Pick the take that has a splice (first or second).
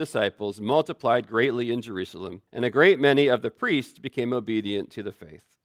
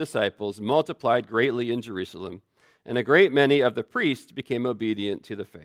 first